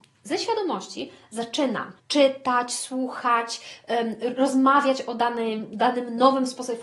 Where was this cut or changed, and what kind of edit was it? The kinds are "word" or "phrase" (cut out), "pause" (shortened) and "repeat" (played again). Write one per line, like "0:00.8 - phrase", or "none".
0:02.0 - pause